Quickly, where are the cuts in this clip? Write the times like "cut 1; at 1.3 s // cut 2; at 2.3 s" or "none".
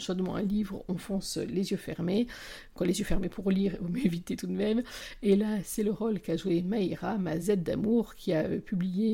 none